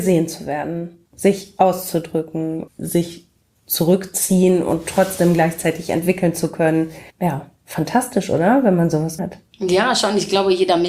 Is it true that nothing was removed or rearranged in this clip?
no; 4 cuts; at 1.1 s, 2.7 s, 7.1 s, 9.2 s

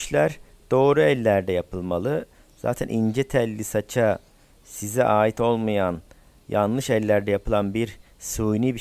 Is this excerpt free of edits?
yes; 0 cuts

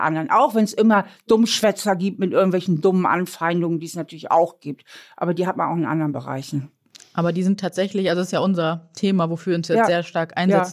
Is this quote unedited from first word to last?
yes; 0 cuts

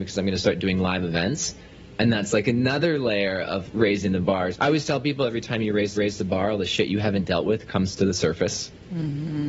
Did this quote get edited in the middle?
yes; 3 cuts; at 3.7 s, 4.5 s, 5.9 s

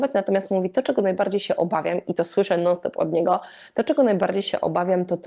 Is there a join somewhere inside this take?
no; 0 cuts

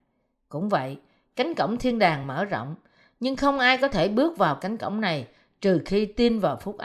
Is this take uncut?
yes; 0 cuts

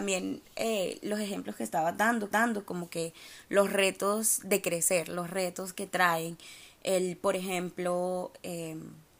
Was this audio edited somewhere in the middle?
yes; 1 cut; at 2.3 s

